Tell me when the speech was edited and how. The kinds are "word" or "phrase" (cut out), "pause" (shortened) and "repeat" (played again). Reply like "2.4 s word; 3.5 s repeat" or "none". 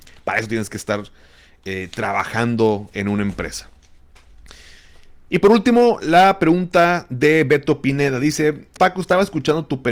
8.8 s word